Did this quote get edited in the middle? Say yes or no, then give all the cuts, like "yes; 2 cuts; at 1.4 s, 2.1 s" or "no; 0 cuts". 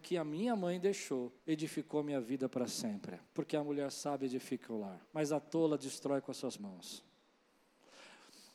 yes; 4 cuts; at 1.4 s, 3.3 s, 5.0 s, 6.6 s